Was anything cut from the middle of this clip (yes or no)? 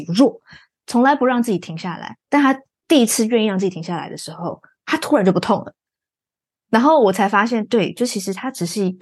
no